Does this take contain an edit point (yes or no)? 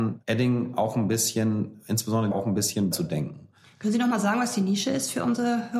yes